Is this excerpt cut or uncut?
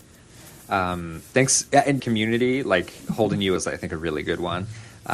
cut